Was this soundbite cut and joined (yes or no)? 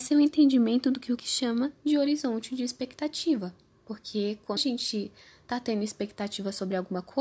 yes